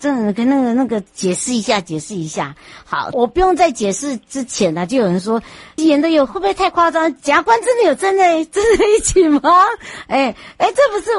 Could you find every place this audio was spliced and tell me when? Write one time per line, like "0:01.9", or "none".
0:03.1
0:05.8